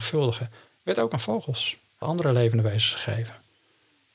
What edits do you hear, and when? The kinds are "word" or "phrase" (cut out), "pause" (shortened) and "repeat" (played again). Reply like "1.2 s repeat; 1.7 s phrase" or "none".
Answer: 2.0 s word